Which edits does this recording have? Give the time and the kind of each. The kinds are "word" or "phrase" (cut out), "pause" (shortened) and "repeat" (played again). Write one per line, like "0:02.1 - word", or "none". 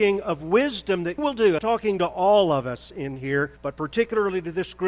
0:01.2 - word
0:01.6 - phrase
0:03.6 - pause